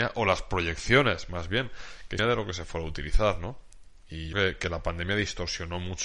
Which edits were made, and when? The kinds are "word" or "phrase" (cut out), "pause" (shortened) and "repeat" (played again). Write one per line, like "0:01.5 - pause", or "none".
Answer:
0:02.2 - phrase
0:04.3 - word